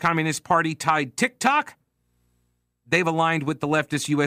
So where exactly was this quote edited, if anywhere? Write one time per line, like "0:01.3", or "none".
none